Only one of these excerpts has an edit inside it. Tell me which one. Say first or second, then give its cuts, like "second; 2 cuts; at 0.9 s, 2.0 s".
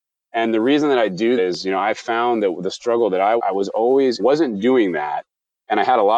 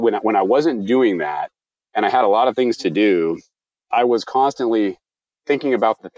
first; 3 cuts; at 1.4 s, 3.4 s, 4.2 s